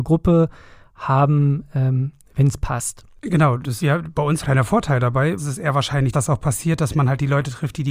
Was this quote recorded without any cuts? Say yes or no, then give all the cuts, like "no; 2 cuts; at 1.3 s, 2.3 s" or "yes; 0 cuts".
no; 5 cuts; at 3.2 s, 3.8 s, 4.4 s, 5.4 s, 6.1 s